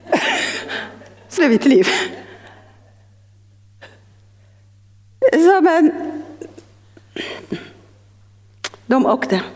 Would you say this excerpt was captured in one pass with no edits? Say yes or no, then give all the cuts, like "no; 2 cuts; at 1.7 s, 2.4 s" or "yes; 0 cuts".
no; 1 cut; at 1.4 s